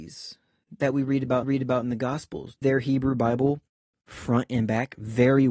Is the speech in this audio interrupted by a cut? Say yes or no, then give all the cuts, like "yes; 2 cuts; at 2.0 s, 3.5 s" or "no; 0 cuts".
yes; 2 cuts; at 1.4 s, 2.6 s